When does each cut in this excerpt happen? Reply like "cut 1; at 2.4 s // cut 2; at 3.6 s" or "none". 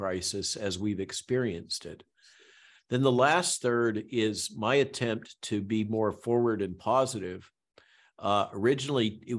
none